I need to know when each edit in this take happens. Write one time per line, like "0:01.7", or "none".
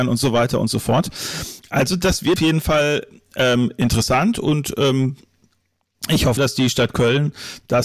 0:02.4
0:06.4